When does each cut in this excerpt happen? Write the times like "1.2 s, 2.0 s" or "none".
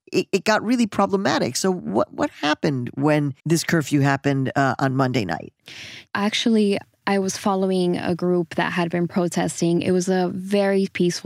3.4 s